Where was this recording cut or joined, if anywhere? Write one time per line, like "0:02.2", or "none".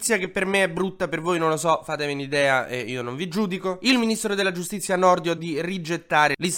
0:05.4